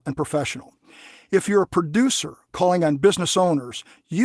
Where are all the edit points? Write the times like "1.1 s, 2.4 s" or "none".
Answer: none